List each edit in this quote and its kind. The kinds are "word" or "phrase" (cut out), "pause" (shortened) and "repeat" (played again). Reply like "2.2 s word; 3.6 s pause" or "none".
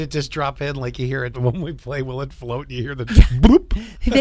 1.3 s word; 3.1 s word